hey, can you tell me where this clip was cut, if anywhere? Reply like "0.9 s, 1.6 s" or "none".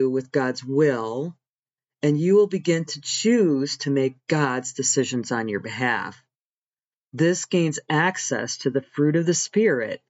none